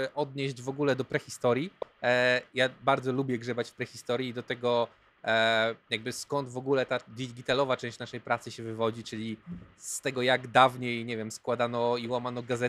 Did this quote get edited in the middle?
no; 0 cuts

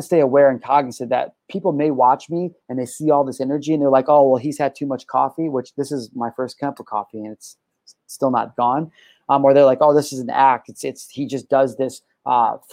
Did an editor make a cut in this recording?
no; 0 cuts

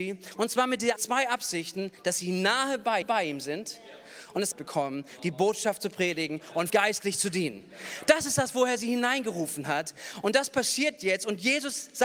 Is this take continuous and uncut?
no; 4 cuts; at 1.0 s, 3.0 s, 4.5 s, 6.7 s

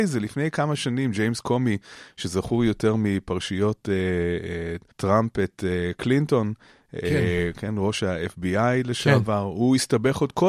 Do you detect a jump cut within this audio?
yes; 1 cut; at 4.9 s

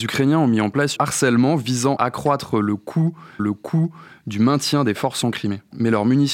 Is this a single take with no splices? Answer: no; 4 cuts; at 1.0 s, 2.0 s, 3.4 s, 5.2 s

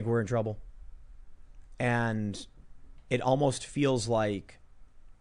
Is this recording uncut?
yes; 0 cuts

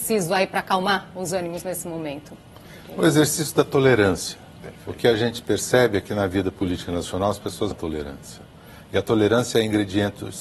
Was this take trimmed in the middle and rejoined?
yes; 1 cut; at 7.7 s

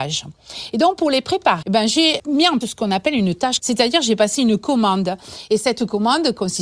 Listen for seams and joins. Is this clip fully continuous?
no; 4 cuts; at 1.6 s, 2.2 s, 2.6 s, 3.6 s

